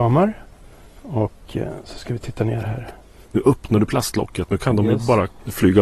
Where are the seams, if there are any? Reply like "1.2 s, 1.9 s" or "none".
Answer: none